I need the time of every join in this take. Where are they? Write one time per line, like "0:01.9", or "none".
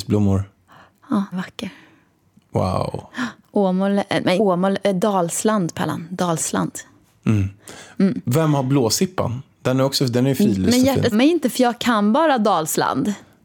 0:01.3
0:04.4
0:11.1